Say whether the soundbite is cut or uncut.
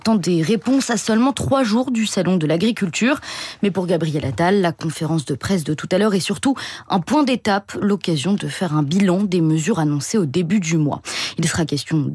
uncut